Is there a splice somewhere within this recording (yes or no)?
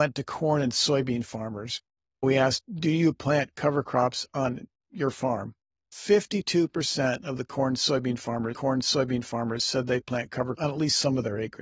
yes